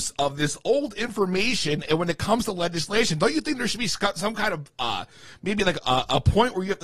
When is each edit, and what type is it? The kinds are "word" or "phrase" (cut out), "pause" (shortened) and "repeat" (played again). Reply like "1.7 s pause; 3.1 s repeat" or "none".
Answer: none